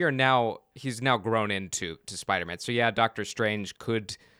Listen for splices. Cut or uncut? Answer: uncut